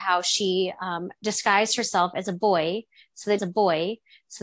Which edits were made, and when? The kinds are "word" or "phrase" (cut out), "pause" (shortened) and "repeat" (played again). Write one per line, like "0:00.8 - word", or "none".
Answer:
0:03.4 - repeat